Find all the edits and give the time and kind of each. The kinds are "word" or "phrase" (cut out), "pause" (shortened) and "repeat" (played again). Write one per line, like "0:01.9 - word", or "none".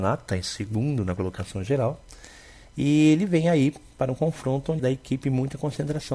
0:04.8 - word